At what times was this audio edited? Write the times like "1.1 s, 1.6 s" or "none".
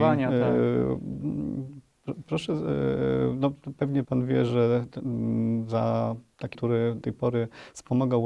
4.0 s, 6.5 s, 7.0 s